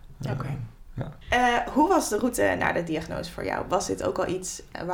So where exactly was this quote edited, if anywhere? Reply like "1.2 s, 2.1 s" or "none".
1.2 s